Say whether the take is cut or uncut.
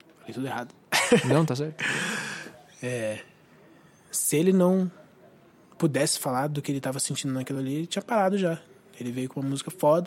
uncut